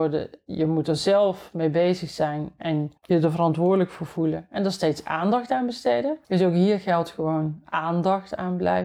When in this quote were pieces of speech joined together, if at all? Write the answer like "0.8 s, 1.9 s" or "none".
3.0 s, 6.2 s

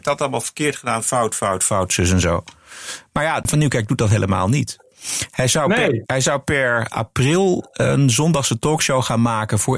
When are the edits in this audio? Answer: none

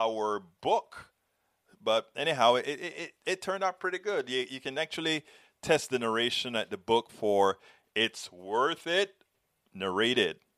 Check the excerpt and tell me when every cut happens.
none

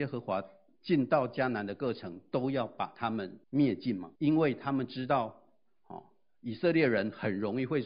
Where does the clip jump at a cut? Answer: 3.4 s, 4.2 s

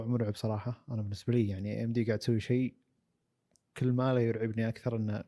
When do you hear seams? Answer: none

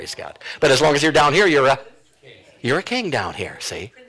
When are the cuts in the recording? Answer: none

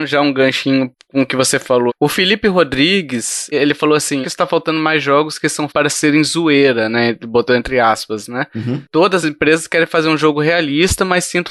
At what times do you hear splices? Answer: 1.9 s, 3.5 s, 4.2 s, 5.7 s, 9.2 s

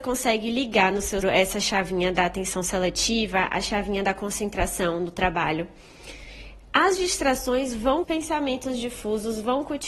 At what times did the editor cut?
1.2 s, 8.0 s

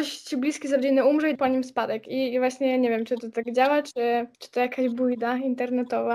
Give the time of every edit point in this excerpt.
1.3 s, 4.3 s

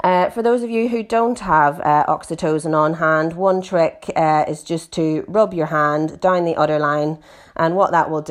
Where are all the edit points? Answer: none

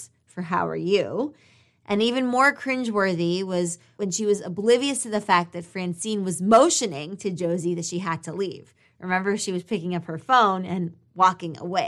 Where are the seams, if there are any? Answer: none

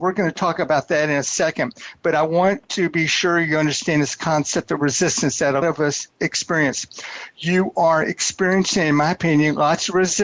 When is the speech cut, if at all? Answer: 5.6 s

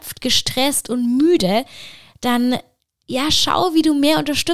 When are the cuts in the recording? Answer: none

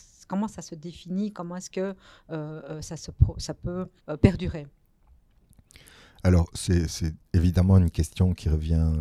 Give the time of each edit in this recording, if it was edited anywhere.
4.0 s

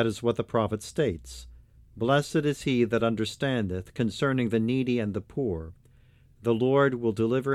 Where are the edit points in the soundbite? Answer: none

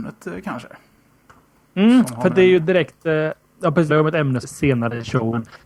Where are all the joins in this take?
3.9 s, 4.4 s

